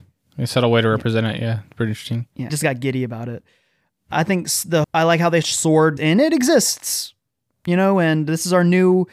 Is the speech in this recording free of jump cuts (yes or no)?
no